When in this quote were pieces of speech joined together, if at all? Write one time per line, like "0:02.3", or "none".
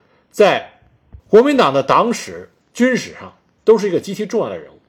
0:01.2
0:02.6